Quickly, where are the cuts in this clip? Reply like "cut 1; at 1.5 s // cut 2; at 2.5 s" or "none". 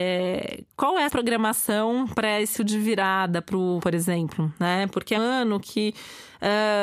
cut 1; at 1.1 s // cut 2; at 2.6 s // cut 3; at 3.8 s // cut 4; at 5.2 s